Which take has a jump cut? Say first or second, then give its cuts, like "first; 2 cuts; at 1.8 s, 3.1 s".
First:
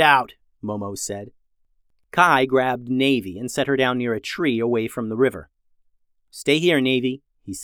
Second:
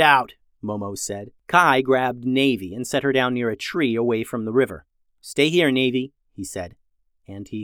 second; 2 cuts; at 1.4 s, 5.0 s